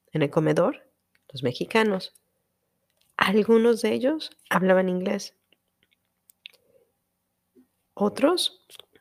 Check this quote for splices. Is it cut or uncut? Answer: uncut